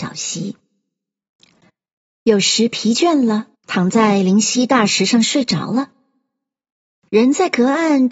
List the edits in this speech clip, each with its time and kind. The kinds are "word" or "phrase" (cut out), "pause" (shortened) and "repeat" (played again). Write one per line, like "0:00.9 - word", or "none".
0:03.5 - pause